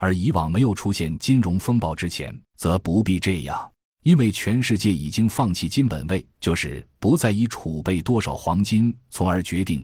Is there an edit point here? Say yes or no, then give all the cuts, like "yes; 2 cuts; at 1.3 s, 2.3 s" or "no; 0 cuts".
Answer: yes; 3 cuts; at 2.4 s, 3.8 s, 6.3 s